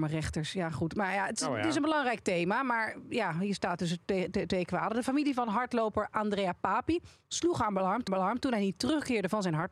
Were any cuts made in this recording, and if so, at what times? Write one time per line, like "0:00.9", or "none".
0:08.1